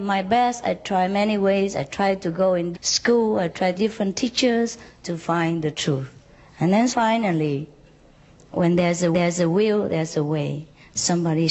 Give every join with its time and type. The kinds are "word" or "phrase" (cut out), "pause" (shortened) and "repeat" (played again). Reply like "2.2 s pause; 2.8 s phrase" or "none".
2.7 s word; 3.8 s word; 5.0 s word; 6.9 s word; 9.1 s repeat